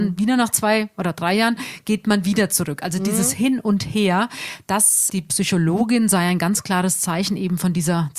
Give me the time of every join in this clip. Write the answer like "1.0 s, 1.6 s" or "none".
5.1 s